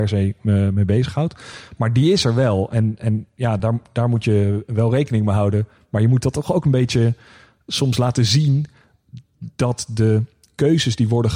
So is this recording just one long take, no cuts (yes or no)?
yes